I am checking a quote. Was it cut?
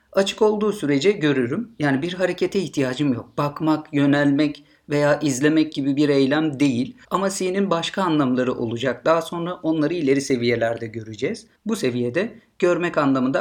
yes; 2 cuts; at 7.0 s, 11.6 s

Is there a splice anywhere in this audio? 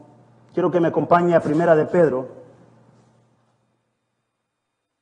no; 0 cuts

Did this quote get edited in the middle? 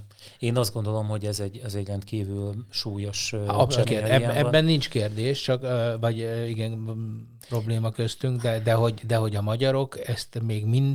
yes; 1 cut; at 3.8 s

